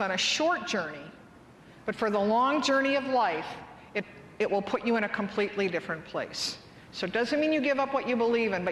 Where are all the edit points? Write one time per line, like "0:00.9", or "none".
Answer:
none